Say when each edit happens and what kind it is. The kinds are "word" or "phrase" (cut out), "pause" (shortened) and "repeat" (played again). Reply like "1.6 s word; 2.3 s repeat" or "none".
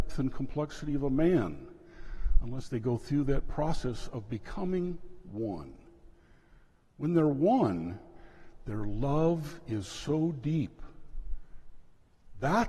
none